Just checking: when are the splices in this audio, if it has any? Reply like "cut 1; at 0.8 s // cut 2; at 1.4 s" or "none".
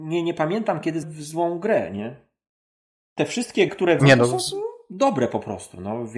cut 1; at 1.0 s // cut 2; at 3.7 s // cut 3; at 4.0 s